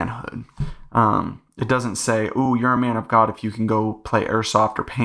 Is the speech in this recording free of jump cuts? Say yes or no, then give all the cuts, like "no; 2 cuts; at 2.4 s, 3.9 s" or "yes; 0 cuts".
yes; 0 cuts